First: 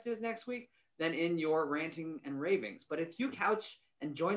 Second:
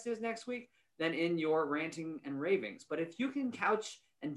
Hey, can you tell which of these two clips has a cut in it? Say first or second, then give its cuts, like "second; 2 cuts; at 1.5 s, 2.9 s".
first; 1 cut; at 3.3 s